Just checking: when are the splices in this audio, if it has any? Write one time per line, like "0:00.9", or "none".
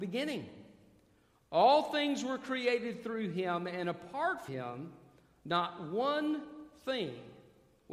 0:04.5